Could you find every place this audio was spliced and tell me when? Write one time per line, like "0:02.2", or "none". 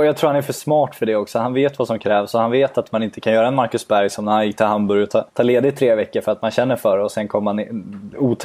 0:05.3